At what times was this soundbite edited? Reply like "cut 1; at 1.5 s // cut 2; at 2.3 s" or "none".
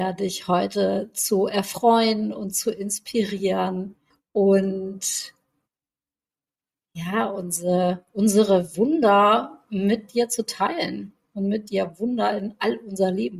cut 1; at 4.1 s